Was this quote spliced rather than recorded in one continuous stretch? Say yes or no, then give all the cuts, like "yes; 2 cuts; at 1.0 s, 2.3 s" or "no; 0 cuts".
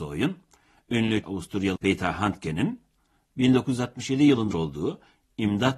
yes; 3 cuts; at 1.2 s, 1.8 s, 4.5 s